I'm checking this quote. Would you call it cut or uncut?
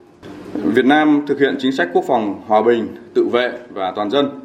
uncut